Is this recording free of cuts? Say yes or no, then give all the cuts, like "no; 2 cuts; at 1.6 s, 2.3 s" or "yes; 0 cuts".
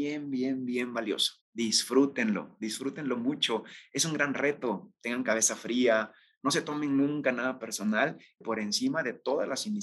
no; 2 cuts; at 1.4 s, 8.4 s